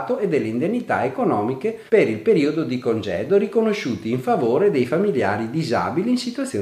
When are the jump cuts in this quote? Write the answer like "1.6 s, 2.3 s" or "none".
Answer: 1.9 s